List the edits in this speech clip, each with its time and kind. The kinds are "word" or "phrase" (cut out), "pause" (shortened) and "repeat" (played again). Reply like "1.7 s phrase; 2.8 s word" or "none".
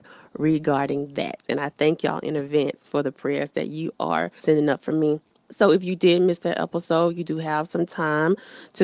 none